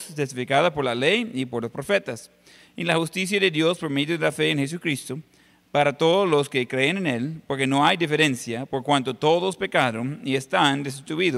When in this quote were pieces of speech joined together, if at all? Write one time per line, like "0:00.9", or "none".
none